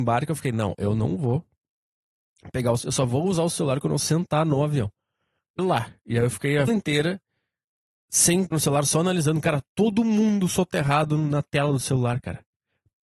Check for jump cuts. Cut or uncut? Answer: cut